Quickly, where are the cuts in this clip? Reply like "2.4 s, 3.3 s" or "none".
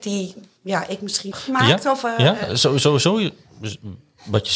1.3 s

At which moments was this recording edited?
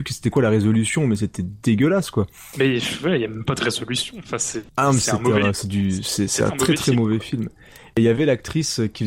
none

